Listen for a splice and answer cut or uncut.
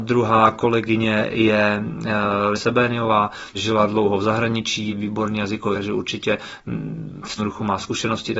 cut